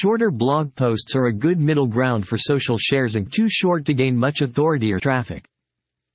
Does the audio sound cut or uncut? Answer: cut